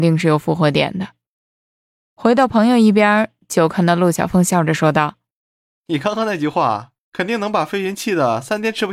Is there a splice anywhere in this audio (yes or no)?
no